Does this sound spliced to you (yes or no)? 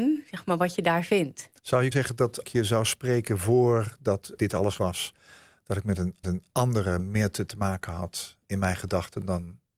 yes